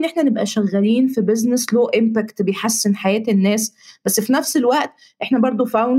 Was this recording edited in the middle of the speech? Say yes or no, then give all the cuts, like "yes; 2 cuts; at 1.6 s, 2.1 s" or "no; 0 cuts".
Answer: no; 0 cuts